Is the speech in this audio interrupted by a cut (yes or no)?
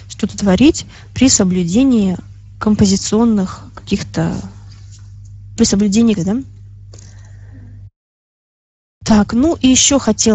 yes